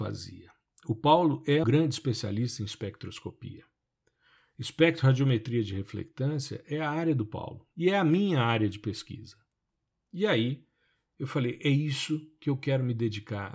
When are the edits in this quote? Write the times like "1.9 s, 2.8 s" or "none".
1.6 s